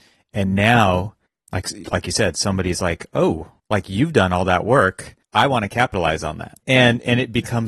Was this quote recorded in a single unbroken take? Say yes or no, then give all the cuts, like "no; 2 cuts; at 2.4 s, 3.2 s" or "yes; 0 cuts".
no; 4 cuts; at 1.3 s, 3.6 s, 5.2 s, 6.6 s